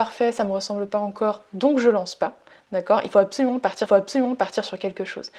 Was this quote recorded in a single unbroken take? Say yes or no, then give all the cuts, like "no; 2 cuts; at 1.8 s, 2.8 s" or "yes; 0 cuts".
no; 1 cut; at 3.9 s